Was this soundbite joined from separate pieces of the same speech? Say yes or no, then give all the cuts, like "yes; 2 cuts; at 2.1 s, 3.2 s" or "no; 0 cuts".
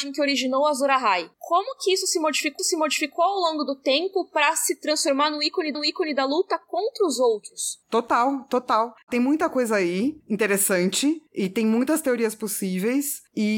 yes; 2 cuts; at 2.6 s, 5.7 s